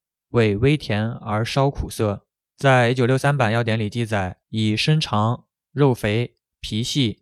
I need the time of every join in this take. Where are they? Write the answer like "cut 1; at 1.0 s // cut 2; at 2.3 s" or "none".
cut 1; at 2.4 s // cut 2; at 4.4 s